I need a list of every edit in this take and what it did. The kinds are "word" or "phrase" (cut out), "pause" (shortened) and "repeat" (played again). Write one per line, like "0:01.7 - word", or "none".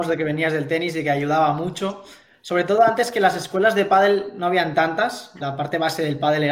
0:05.4 - word